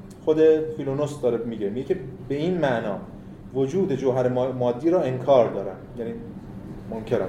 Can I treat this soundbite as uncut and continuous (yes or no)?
yes